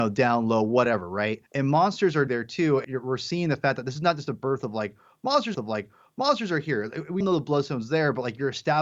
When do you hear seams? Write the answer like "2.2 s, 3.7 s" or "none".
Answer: 1.5 s, 2.3 s, 2.8 s, 5.5 s, 7.2 s